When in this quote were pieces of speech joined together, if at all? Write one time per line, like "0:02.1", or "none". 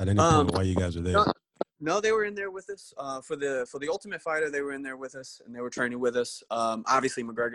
none

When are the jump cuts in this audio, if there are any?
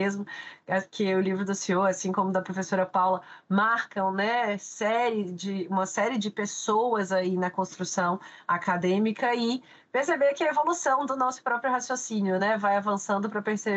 none

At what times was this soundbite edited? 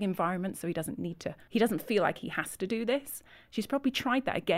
0:01.5

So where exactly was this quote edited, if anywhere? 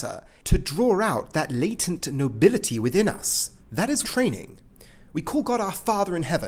0:03.6
0:04.0

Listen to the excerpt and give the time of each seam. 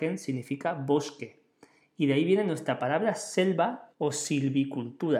0:03.9

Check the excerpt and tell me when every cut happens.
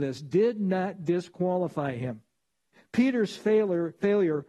none

